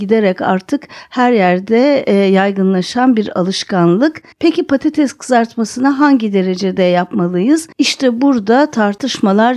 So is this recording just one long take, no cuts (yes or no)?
no